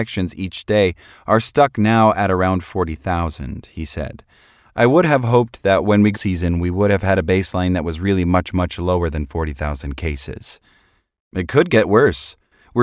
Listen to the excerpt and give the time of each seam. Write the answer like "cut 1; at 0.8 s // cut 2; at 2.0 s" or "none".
cut 1; at 6.1 s